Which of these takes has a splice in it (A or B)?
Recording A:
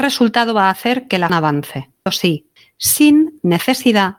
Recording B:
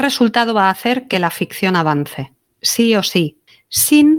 A